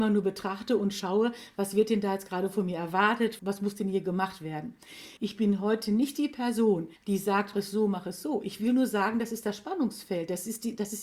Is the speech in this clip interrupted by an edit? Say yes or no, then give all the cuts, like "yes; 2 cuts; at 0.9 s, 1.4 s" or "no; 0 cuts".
yes; 4 cuts; at 3.4 s, 5.2 s, 7.0 s, 7.5 s